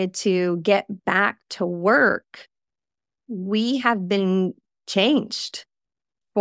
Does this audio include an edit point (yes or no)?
no